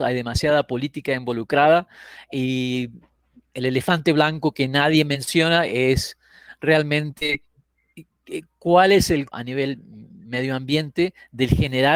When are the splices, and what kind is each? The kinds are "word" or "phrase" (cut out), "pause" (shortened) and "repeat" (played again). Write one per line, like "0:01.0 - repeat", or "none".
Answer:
0:09.3 - word

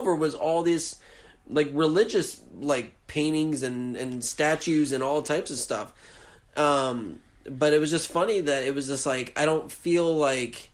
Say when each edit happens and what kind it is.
none

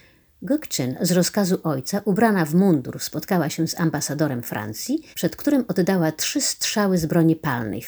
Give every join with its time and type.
0:05.1 - pause

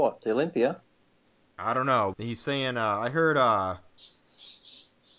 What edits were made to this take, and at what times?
0:02.1 - word

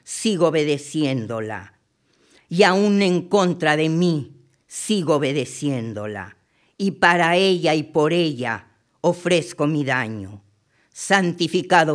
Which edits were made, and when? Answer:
none

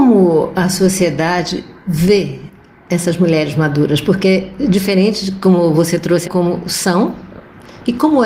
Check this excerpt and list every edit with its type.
0:06.2 - word

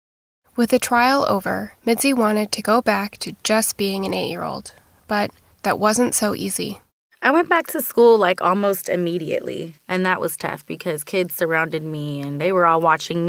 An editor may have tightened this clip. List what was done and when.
0:01.8 - pause
0:05.5 - pause
0:06.9 - pause

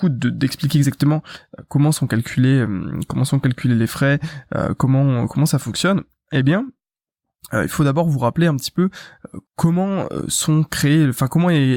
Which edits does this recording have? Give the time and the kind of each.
0:09.5 - pause

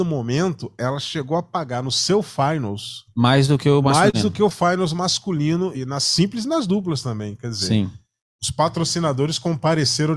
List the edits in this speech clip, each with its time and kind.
0:05.7 - word

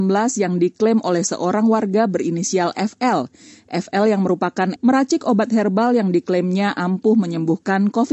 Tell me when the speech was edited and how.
0:04.8 - word

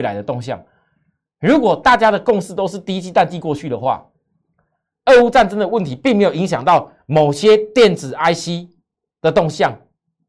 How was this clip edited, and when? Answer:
none

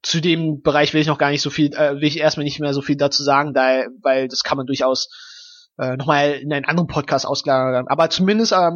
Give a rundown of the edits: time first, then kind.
none

